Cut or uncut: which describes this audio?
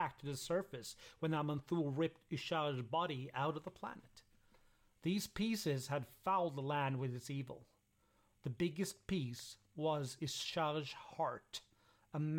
uncut